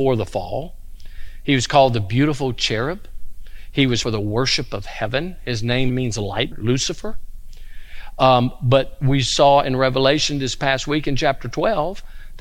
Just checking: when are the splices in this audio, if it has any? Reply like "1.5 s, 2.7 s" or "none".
4.0 s, 5.9 s, 6.5 s

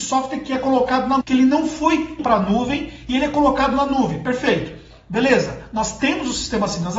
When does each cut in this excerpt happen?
1.2 s, 2.2 s

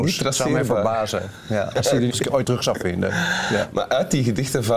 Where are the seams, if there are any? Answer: 2.1 s, 2.4 s

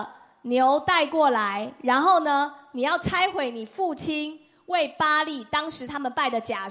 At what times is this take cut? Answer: none

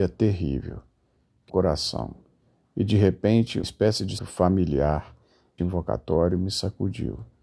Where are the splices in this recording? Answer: 1.5 s, 3.6 s, 4.2 s, 5.6 s

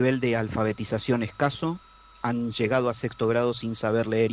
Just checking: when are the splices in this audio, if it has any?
none

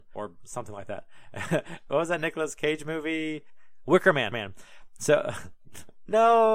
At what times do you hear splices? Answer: 4.3 s

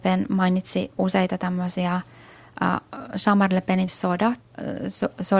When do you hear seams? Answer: 3.9 s

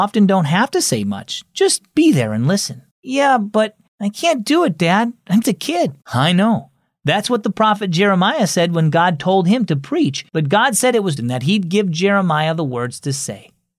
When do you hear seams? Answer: 2.9 s, 3.9 s, 5.4 s, 6.0 s, 10.3 s, 11.2 s

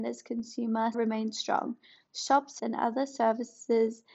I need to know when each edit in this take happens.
0.9 s, 2.6 s

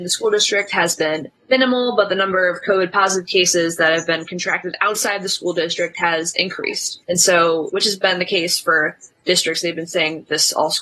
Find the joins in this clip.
1.4 s, 7.0 s, 7.7 s

